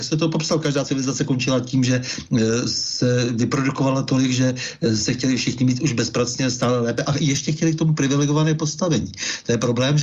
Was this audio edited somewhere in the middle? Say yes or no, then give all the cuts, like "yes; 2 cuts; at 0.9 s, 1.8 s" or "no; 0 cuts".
no; 0 cuts